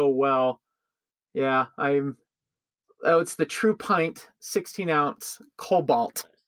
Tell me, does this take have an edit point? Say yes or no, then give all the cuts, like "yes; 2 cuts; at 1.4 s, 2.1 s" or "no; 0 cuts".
no; 0 cuts